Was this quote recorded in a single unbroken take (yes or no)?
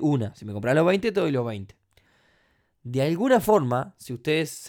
yes